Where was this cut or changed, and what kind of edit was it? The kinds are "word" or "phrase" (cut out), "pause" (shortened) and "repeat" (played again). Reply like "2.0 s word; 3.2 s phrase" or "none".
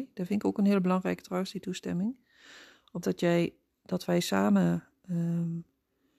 3.0 s word